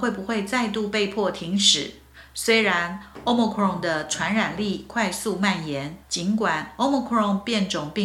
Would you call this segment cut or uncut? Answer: cut